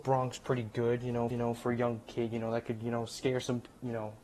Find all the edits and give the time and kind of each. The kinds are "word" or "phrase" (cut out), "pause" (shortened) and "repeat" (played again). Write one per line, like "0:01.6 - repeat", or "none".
0:01.3 - repeat